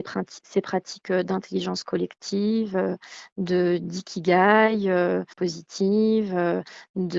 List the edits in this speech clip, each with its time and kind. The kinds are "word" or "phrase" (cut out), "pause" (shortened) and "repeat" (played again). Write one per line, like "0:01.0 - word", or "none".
0:05.3 - phrase